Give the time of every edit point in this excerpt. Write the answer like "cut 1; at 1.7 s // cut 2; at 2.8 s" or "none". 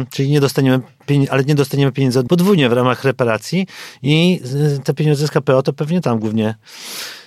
cut 1; at 2.3 s // cut 2; at 6.0 s